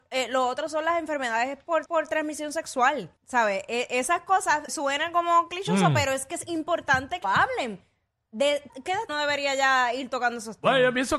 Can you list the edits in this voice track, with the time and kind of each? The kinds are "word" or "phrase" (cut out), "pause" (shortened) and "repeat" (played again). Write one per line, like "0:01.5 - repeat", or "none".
0:01.9 - repeat
0:03.2 - pause
0:04.7 - word
0:07.2 - word
0:08.7 - word
0:09.1 - phrase